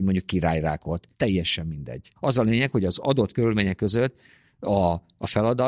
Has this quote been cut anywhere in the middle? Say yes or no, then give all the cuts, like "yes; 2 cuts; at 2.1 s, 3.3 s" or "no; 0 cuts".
yes; 2 cuts; at 1.1 s, 2.2 s